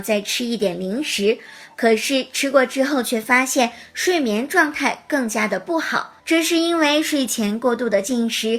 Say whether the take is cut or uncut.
cut